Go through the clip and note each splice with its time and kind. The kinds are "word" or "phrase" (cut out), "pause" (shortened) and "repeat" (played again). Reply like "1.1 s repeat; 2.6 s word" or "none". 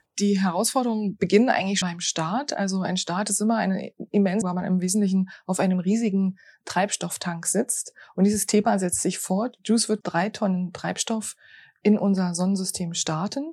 1.8 s word; 4.4 s word; 10.0 s word